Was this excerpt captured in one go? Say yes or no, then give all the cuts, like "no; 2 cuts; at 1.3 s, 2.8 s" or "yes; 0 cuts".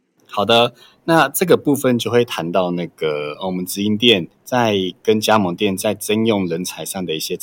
no; 1 cut; at 4.3 s